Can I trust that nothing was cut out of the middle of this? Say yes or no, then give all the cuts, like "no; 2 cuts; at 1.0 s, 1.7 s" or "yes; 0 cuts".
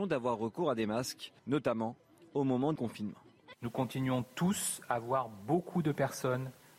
no; 2 cuts; at 1.4 s, 2.8 s